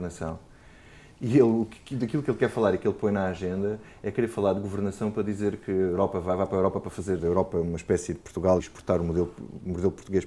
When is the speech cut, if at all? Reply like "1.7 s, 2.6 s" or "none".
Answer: 7.2 s, 8.6 s